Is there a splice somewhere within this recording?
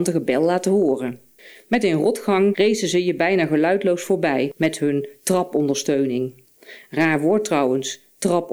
yes; 1 cut; at 1.4 s

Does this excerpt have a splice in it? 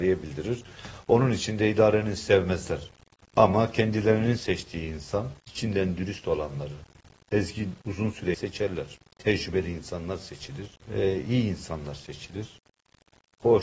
yes; 6 cuts; at 2.2 s, 3.1 s, 5.4 s, 8.3 s, 9.1 s, 10.8 s

